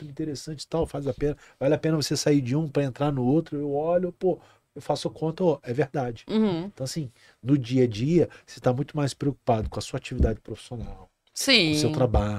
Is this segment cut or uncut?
uncut